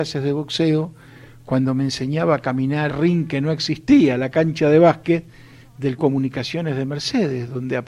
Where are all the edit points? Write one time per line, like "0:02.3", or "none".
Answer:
0:02.9
0:06.0

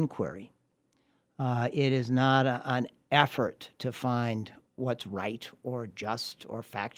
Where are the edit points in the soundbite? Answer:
none

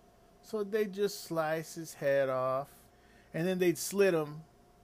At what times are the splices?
0:02.9

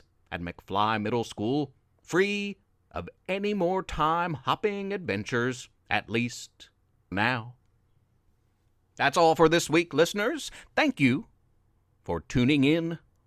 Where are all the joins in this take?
0:01.8
0:05.8
0:07.1

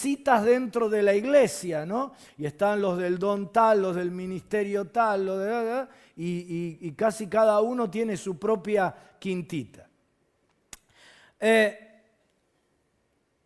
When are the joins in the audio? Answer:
none

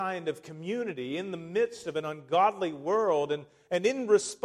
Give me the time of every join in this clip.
none

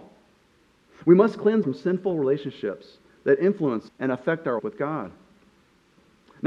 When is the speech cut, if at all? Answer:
0:01.6
0:03.9
0:04.6

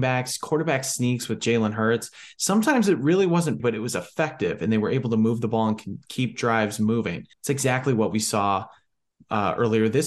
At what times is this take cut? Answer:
0:03.6
0:07.3

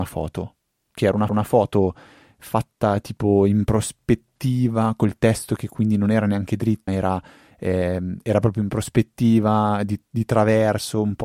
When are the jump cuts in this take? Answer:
0:01.3
0:06.9

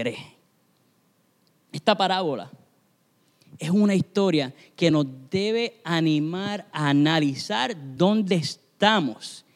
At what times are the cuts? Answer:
none

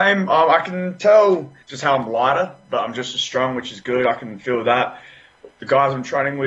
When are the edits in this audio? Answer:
0:01.6

